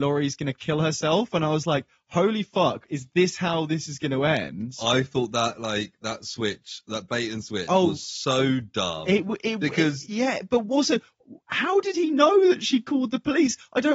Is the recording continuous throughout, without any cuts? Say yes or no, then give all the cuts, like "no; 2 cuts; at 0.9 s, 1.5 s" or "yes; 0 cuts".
yes; 0 cuts